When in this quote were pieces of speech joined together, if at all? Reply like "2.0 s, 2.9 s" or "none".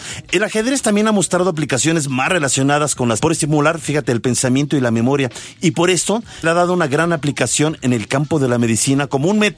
3.2 s, 6.4 s